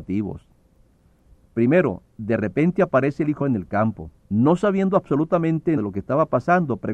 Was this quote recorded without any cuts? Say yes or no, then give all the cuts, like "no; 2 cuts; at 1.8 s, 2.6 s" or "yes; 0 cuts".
no; 4 cuts; at 2.1 s, 3.4 s, 4.2 s, 5.8 s